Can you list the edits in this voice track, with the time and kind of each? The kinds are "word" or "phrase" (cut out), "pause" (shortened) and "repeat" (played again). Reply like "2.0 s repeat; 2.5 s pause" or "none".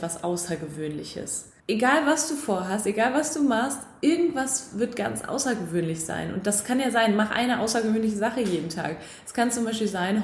1.6 s pause